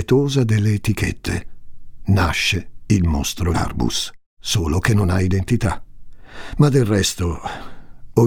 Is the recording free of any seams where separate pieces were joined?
no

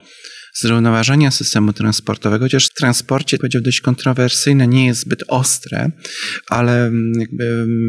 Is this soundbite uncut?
no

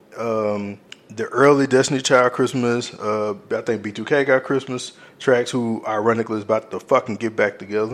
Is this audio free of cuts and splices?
yes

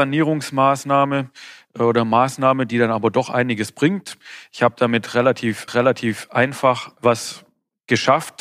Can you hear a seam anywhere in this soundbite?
yes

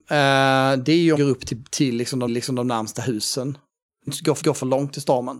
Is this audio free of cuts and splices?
no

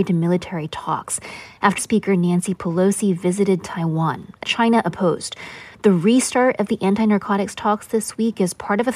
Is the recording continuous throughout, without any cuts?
no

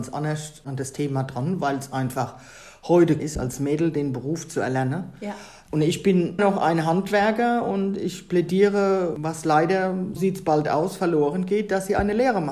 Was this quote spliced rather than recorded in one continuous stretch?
yes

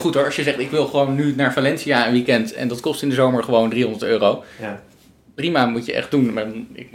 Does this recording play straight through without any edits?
yes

